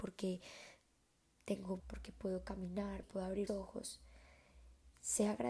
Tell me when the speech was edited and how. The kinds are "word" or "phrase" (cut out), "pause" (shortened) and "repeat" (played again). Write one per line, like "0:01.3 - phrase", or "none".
0:01.8 - word
0:03.0 - word
0:03.5 - word